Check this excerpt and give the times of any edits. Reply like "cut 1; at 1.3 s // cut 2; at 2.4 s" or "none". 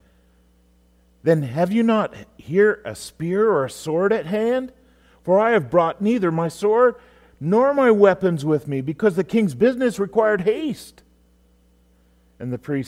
none